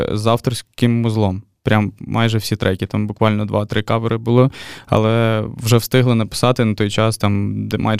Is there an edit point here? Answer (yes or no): no